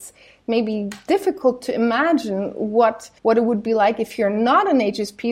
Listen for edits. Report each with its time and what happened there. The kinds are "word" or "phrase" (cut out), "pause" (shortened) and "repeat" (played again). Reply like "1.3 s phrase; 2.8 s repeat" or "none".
3.2 s pause